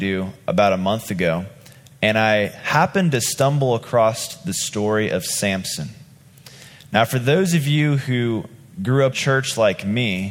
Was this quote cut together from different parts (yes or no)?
yes